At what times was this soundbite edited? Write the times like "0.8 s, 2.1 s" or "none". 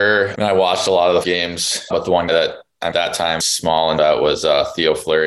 1.2 s, 1.9 s, 2.3 s, 2.9 s, 3.4 s, 4.0 s